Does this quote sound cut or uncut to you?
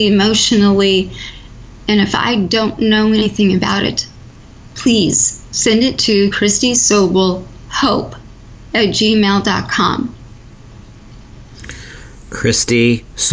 uncut